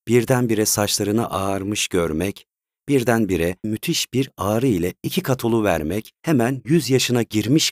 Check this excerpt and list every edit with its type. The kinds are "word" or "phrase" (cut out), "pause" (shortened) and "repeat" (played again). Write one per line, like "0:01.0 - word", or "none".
0:03.6 - word